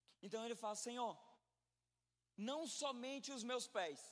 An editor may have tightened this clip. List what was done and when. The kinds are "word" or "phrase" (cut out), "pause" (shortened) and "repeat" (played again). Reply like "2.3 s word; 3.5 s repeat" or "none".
none